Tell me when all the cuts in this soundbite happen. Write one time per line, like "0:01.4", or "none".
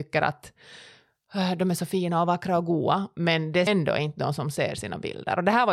0:03.7